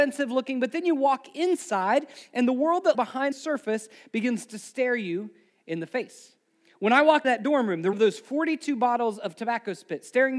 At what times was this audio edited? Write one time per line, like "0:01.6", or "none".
0:02.9
0:03.3
0:07.2
0:07.9